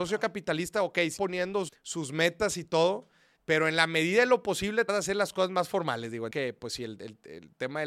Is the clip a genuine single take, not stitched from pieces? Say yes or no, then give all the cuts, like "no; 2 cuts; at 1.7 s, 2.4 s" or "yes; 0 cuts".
no; 5 cuts; at 1.2 s, 1.7 s, 3.4 s, 4.9 s, 6.3 s